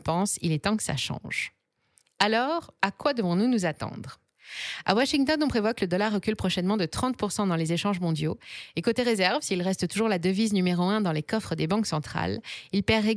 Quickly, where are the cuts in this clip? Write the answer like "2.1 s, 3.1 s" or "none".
none